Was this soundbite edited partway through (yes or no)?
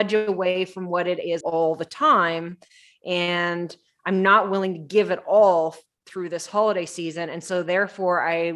yes